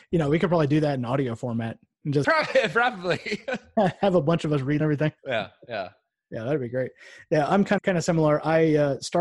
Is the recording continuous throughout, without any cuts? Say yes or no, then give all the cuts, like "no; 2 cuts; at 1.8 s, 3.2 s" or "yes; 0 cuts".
no; 4 cuts; at 2.2 s, 4.8 s, 5.2 s, 7.8 s